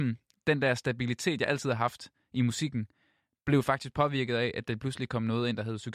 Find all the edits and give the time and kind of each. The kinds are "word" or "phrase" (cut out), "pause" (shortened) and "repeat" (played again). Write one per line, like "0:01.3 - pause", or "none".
none